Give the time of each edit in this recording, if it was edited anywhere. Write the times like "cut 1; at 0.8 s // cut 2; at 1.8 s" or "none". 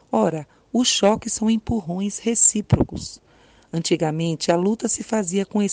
none